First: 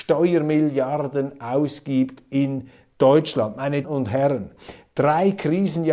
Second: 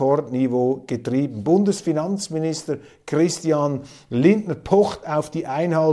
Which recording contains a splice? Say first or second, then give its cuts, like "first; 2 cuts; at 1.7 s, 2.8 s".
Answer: first; 1 cut; at 3.8 s